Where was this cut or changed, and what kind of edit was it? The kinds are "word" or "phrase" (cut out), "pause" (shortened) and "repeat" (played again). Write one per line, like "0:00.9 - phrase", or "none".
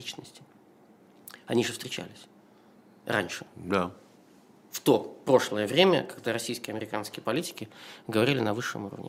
none